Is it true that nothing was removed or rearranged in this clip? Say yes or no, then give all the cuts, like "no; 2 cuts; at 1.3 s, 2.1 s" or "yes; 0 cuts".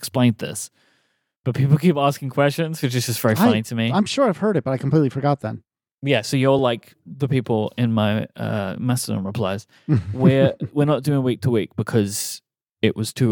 yes; 0 cuts